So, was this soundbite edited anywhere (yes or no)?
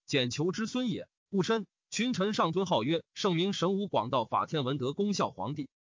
yes